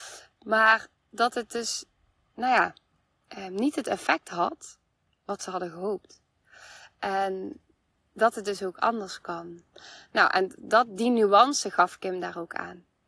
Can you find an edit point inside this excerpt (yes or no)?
no